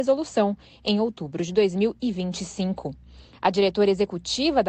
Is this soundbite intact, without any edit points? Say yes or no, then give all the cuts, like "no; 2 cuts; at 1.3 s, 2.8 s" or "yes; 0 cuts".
yes; 0 cuts